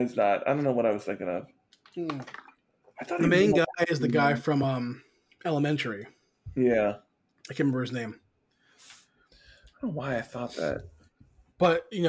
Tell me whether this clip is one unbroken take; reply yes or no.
yes